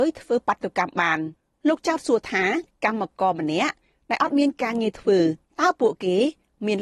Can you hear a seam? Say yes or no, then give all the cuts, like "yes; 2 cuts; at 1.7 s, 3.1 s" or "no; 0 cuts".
no; 0 cuts